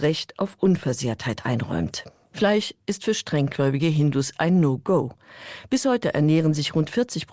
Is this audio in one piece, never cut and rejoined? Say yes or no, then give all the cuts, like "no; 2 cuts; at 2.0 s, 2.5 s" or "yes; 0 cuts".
yes; 0 cuts